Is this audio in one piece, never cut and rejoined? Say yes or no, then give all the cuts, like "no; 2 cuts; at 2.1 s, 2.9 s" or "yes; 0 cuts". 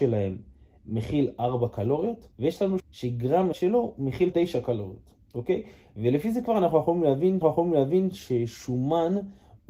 no; 6 cuts; at 2.3 s, 2.8 s, 3.5 s, 4.3 s, 5.2 s, 7.4 s